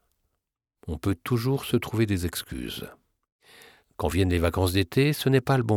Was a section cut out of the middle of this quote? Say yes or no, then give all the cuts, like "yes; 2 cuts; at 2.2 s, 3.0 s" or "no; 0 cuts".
no; 0 cuts